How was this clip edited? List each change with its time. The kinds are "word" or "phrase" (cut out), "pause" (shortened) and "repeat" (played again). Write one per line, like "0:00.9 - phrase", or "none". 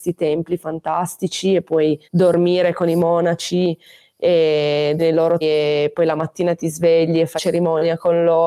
0:02.0 - pause
0:05.0 - word
0:05.4 - word
0:07.4 - word